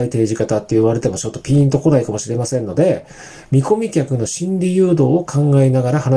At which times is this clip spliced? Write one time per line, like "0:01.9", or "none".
none

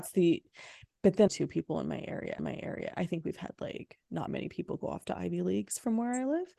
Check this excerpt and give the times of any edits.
0:01.3
0:02.4
0:04.3

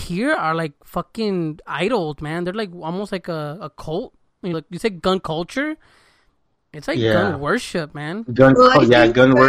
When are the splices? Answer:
0:04.5

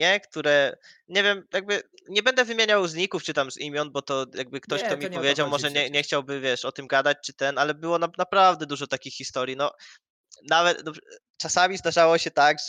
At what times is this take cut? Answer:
none

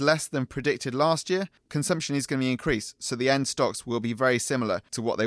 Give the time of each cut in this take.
0:01.6

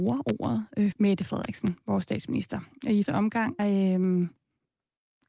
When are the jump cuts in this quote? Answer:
0:00.9
0:03.1
0:03.6

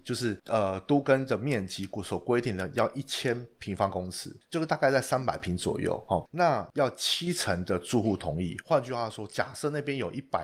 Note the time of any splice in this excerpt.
none

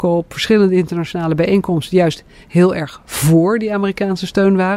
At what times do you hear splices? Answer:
none

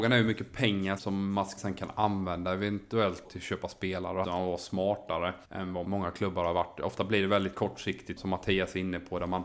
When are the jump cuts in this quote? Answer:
0:01.0
0:01.6
0:03.2
0:04.2
0:05.4
0:05.8
0:08.2

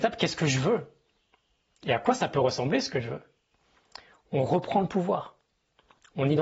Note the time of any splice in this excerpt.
none

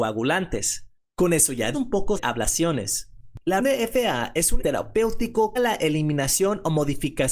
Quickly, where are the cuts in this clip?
0:01.0
0:01.7
0:02.2
0:03.6
0:04.6
0:05.6

